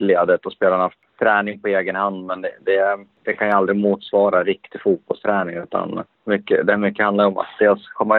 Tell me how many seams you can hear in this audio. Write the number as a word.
zero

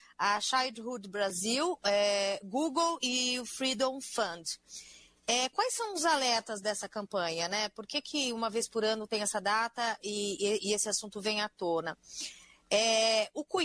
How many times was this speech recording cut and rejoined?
zero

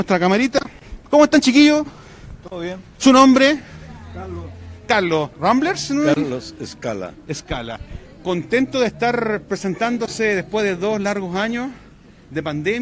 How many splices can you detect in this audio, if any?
two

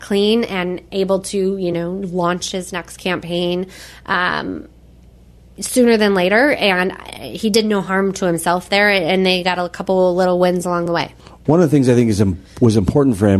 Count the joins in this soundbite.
zero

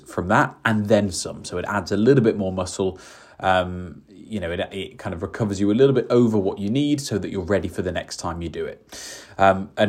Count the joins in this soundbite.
zero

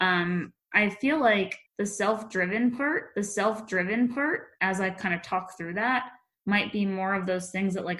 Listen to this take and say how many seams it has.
two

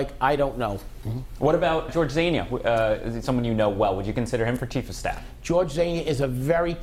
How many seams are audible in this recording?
one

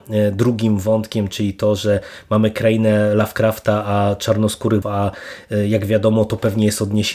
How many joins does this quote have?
one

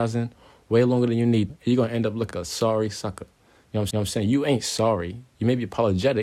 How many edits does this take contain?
three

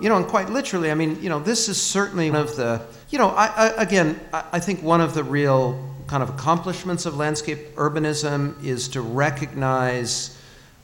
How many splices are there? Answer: two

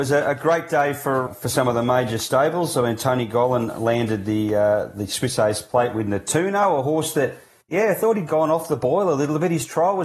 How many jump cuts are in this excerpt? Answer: three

